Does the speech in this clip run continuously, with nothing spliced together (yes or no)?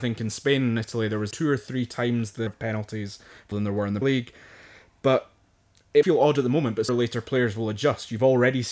no